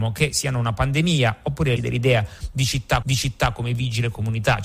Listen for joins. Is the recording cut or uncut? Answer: cut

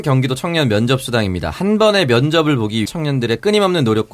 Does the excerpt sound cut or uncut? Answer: cut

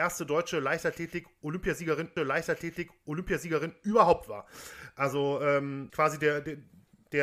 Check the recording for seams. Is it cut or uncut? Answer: cut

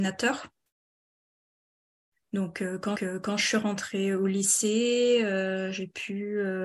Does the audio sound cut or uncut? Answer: cut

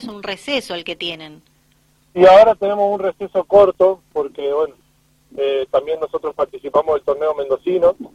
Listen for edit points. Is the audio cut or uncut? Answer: uncut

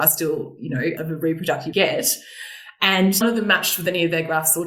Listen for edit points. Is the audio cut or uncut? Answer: cut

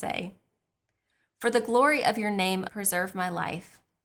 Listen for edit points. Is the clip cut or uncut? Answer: cut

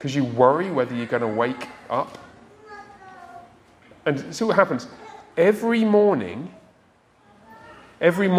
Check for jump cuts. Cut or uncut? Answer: uncut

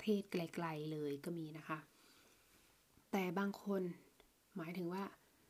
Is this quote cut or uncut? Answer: uncut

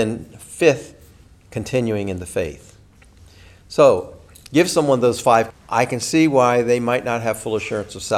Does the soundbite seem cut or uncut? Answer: cut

